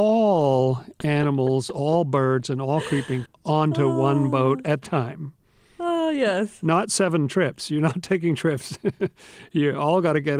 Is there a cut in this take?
yes; 2 cuts; at 3.3 s, 4.8 s

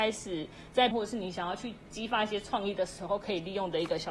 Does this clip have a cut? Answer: yes; 1 cut; at 0.9 s

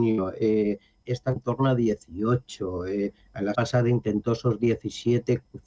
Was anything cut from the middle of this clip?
yes; 3 cuts; at 1.0 s, 1.4 s, 3.5 s

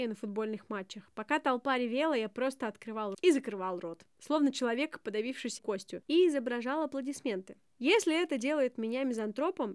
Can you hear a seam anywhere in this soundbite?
yes; 2 cuts; at 3.1 s, 5.6 s

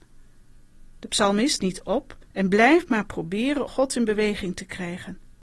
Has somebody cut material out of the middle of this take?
yes; 3 cuts; at 1.6 s, 2.3 s, 3.7 s

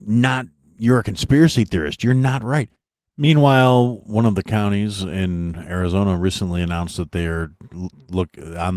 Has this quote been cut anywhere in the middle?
no; 0 cuts

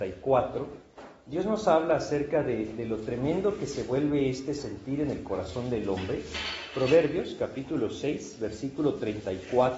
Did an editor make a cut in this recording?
no; 0 cuts

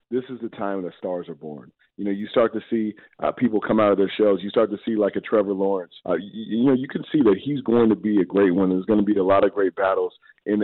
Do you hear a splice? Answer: yes; 1 cut; at 6.0 s

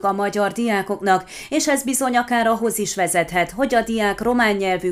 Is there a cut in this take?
no; 0 cuts

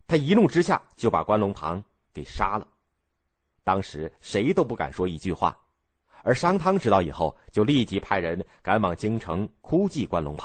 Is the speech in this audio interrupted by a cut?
no; 0 cuts

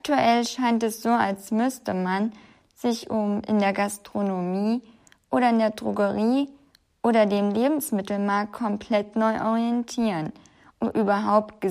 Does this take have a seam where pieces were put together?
no; 0 cuts

